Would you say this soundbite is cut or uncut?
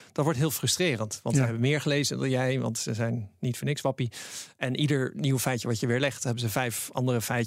uncut